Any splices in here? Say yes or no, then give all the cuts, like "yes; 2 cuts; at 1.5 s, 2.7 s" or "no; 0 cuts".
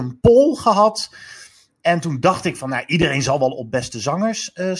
no; 0 cuts